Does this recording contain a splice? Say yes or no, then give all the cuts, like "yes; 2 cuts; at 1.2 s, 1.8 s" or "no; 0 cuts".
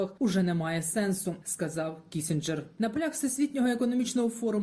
no; 0 cuts